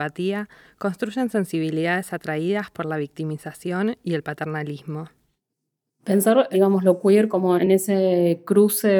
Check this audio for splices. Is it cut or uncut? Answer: uncut